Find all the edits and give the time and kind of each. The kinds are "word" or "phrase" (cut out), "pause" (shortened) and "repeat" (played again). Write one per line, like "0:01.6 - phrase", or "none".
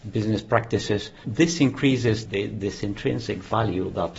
0:01.2 - word
0:02.3 - word